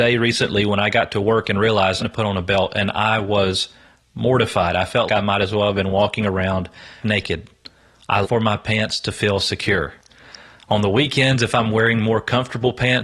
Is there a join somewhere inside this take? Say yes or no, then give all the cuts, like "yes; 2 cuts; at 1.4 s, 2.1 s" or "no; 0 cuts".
yes; 4 cuts; at 2.0 s, 5.1 s, 7.0 s, 8.2 s